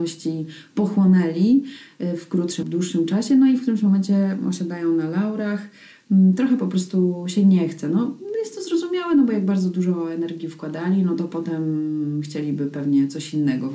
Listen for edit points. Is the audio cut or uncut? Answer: cut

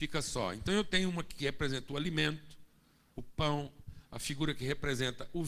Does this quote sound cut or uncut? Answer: uncut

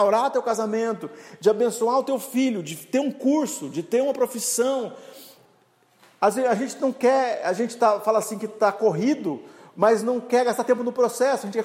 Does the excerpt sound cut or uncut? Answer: uncut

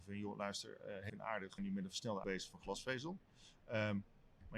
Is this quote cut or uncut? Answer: cut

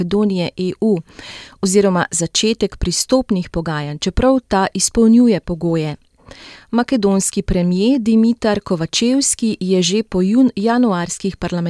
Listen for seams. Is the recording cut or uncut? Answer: uncut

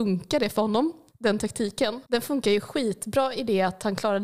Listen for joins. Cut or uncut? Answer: cut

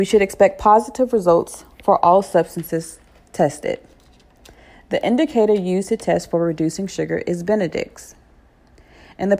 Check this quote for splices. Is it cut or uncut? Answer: uncut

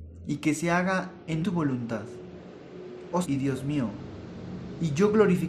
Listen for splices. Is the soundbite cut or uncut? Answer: cut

